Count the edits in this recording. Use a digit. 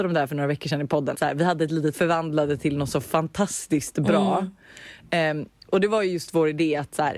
2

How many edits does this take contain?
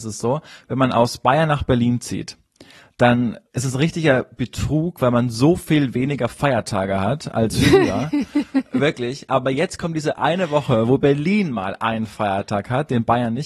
1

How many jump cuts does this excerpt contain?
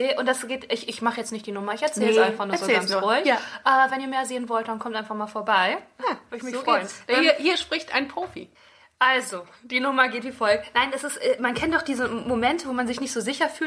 0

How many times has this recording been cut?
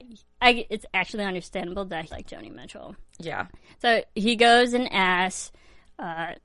2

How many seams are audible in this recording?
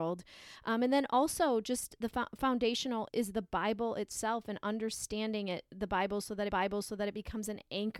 2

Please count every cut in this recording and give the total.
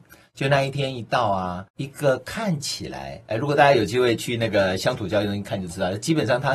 1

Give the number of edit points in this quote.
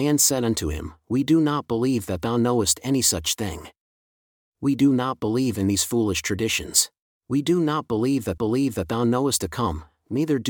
3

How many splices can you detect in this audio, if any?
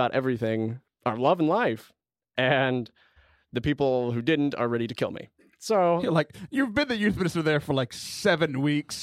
0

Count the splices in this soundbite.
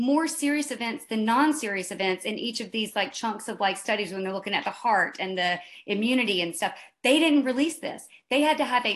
0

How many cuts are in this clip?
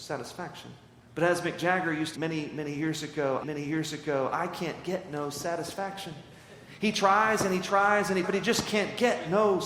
4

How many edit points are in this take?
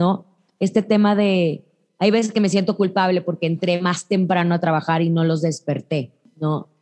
0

